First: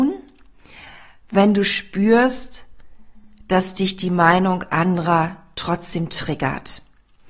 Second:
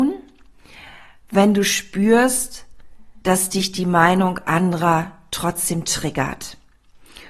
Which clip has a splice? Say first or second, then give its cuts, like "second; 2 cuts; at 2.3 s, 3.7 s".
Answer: second; 1 cut; at 3.2 s